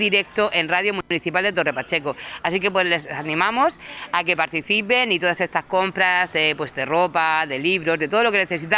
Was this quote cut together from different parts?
no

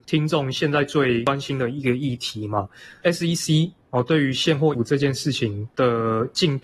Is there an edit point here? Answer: yes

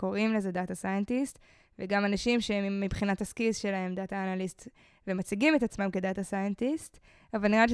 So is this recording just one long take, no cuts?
yes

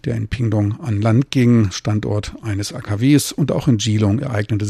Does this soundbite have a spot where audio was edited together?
no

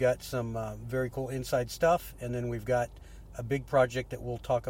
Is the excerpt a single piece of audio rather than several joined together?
yes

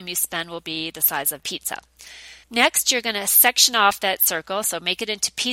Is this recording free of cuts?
no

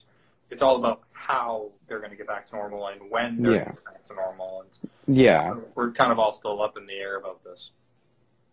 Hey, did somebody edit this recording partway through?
yes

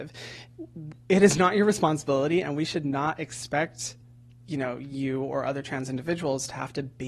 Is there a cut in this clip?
no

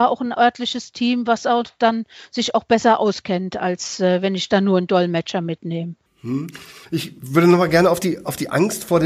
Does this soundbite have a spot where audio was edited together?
no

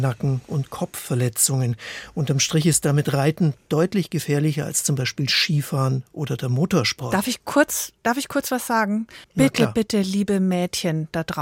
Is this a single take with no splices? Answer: no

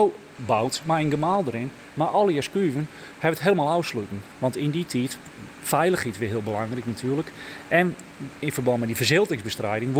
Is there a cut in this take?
no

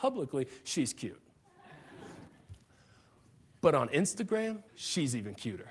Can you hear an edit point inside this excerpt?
yes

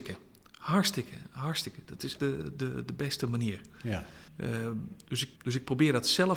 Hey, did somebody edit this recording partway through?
yes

